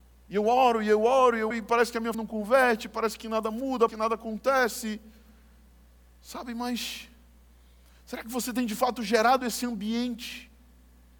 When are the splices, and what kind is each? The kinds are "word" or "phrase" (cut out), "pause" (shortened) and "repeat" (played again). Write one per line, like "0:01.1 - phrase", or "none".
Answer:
0:01.5 - word
0:02.1 - word
0:03.9 - word